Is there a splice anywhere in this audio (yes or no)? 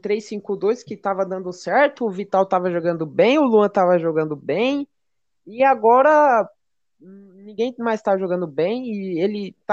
no